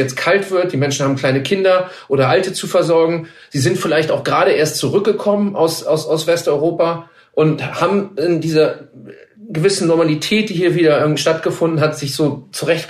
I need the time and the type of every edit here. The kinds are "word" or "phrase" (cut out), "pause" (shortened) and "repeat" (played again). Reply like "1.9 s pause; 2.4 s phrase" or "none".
none